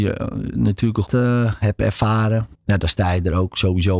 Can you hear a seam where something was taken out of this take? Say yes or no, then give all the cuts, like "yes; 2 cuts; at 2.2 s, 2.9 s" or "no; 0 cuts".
yes; 2 cuts; at 1.1 s, 2.5 s